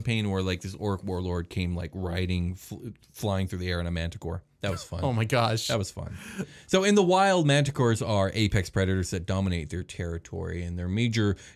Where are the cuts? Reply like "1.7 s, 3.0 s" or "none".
none